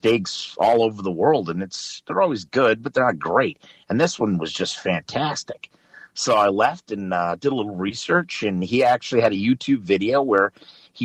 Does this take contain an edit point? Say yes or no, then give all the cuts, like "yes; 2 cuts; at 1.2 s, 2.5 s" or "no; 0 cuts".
no; 0 cuts